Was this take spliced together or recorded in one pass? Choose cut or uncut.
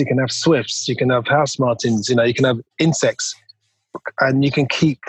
cut